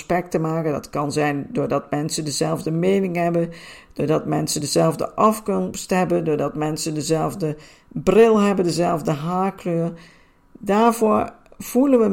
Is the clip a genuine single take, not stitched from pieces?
yes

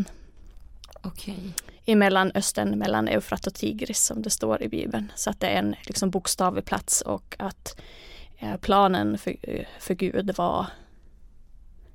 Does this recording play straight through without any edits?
yes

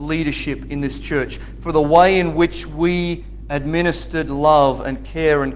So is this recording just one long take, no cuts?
yes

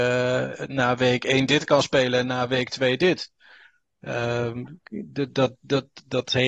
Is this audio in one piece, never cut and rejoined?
yes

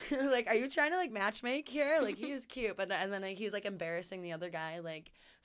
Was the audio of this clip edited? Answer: no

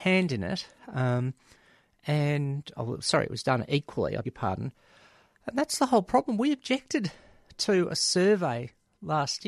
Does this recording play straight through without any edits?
no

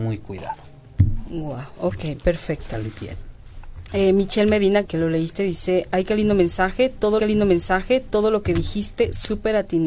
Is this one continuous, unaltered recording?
no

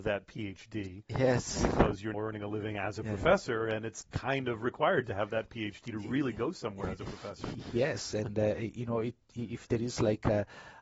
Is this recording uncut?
no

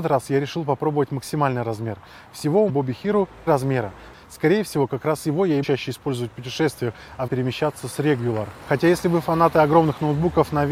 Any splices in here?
yes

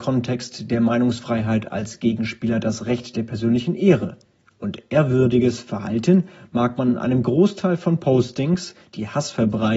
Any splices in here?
no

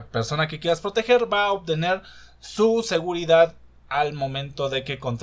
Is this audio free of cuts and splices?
yes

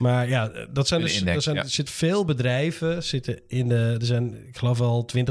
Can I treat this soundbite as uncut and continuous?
no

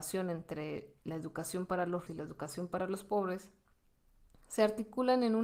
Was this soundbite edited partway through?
yes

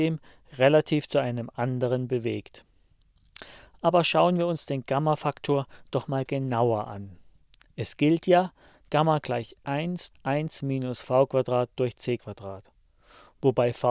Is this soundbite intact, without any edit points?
no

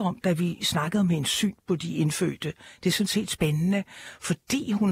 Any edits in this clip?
no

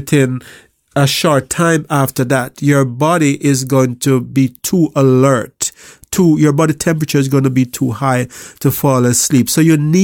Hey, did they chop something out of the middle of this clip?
no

